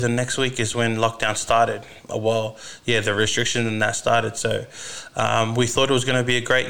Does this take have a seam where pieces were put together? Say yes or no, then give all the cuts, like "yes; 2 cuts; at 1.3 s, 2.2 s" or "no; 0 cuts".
no; 0 cuts